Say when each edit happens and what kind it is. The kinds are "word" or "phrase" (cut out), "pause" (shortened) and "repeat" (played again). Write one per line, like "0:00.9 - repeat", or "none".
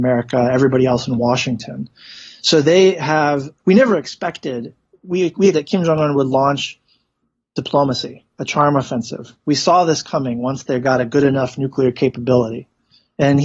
0:03.6 - word
0:05.5 - word